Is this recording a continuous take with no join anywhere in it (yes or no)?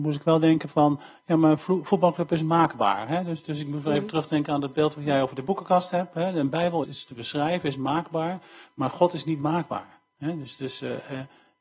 no